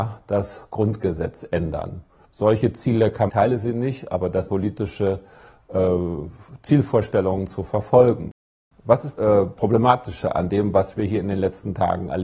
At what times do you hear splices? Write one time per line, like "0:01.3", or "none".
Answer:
0:02.2
0:03.3
0:04.5
0:09.2